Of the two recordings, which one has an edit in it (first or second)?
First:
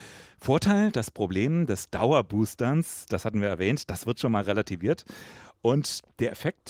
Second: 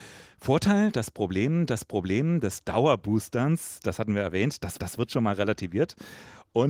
second